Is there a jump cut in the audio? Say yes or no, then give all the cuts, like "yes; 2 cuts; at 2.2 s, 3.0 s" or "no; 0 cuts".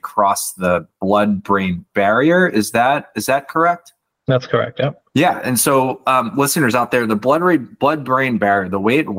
yes; 1 cut; at 5.1 s